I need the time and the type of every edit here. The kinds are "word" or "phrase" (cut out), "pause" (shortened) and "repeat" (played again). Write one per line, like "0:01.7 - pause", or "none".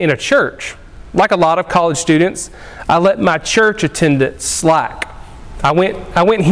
none